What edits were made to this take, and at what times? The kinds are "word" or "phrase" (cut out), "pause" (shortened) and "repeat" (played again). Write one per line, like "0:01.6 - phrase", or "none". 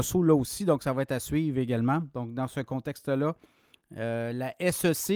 none

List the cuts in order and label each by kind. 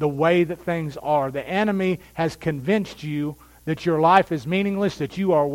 none

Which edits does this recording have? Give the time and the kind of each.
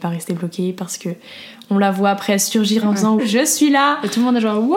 0:02.8 - phrase
0:03.2 - word

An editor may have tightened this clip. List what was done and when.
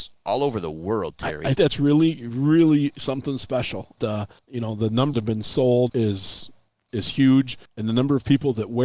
0:01.6 - word
0:04.0 - word
0:04.4 - pause
0:05.1 - phrase
0:05.9 - word
0:07.7 - pause

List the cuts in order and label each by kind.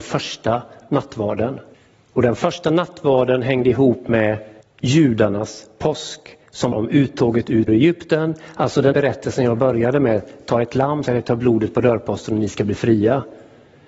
0:01.7 - pause
0:04.6 - pause
0:06.7 - word
0:07.7 - word
0:08.9 - word
0:11.1 - word

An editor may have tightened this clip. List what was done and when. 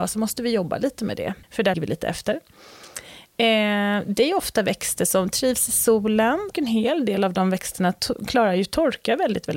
0:01.4 - pause
0:01.7 - word
0:06.5 - word

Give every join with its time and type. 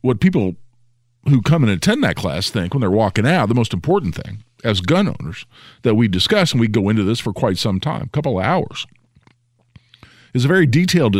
none

